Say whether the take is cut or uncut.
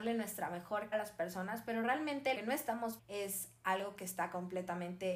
cut